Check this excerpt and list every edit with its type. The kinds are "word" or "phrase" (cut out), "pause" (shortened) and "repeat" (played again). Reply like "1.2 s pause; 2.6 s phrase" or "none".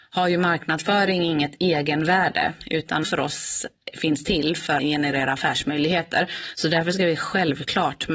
3.0 s word; 4.8 s word